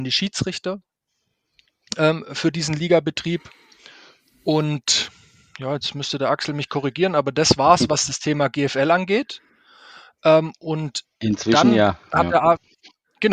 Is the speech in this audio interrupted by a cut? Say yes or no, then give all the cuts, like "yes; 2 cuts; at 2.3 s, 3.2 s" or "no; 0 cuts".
no; 0 cuts